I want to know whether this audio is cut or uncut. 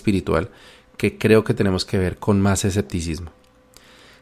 uncut